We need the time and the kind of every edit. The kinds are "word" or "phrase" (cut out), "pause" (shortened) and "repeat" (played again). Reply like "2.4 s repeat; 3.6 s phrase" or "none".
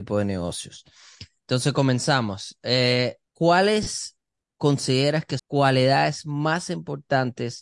3.3 s pause; 5.4 s phrase